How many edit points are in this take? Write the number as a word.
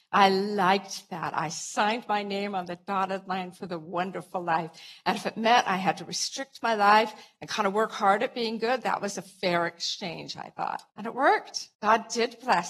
two